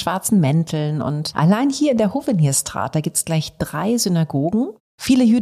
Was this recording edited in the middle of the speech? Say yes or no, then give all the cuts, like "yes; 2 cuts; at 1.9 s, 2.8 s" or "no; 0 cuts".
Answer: no; 0 cuts